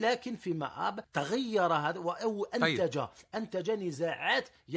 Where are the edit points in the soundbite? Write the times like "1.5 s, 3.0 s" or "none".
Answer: 1.0 s